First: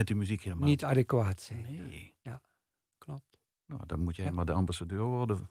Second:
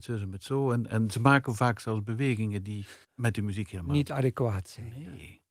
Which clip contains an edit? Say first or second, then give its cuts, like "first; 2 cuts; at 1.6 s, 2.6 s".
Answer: second; 1 cut; at 3.0 s